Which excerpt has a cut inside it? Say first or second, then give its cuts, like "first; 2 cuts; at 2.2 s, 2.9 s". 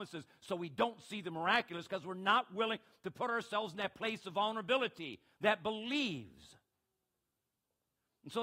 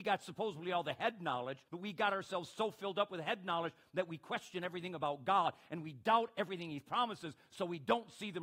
second; 1 cut; at 1.7 s